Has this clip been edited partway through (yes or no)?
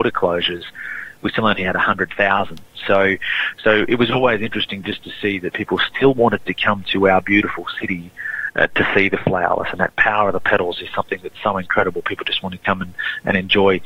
no